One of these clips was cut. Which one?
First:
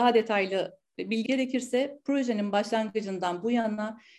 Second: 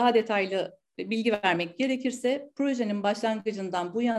first; 1 cut; at 1.3 s

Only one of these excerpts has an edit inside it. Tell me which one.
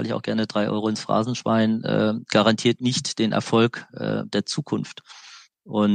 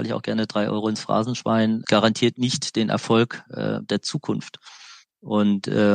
second; 1 cut; at 1.8 s

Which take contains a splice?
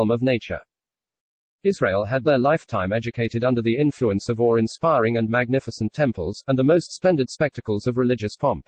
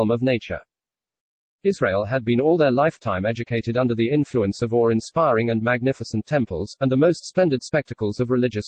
first; 1 cut; at 2.2 s

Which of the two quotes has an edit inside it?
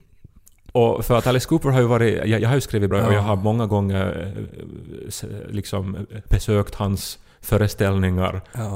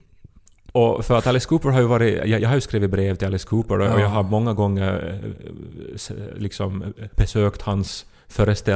first; 1 cut; at 2.9 s

